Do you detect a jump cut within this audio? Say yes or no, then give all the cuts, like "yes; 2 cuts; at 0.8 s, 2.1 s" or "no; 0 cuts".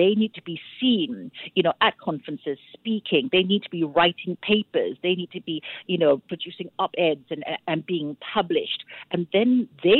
no; 0 cuts